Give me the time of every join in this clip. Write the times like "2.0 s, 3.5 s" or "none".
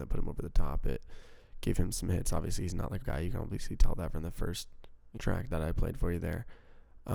3.0 s, 5.2 s